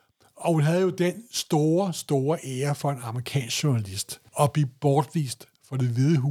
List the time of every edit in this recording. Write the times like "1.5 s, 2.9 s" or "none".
4.3 s